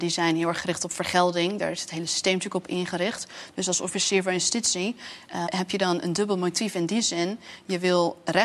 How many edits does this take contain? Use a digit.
1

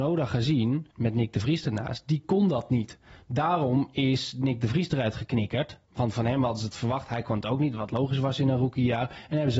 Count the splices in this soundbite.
2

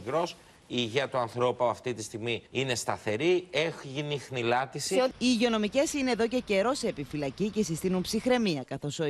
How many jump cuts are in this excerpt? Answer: 2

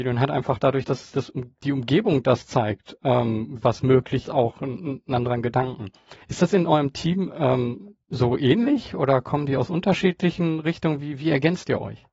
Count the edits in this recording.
2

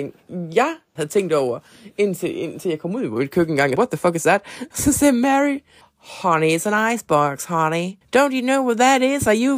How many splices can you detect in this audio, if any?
4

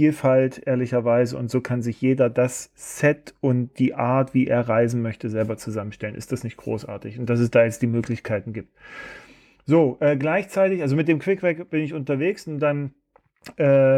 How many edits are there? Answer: 0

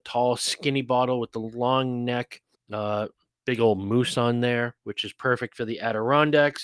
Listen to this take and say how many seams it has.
2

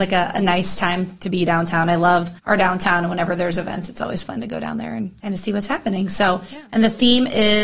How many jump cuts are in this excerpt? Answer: 2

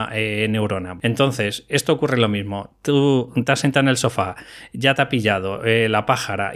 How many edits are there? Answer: 0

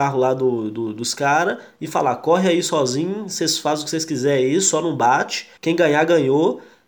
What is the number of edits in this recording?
1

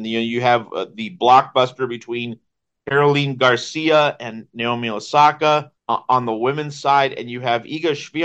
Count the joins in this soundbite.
1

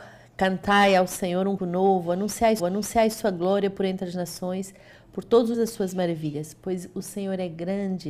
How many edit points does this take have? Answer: 3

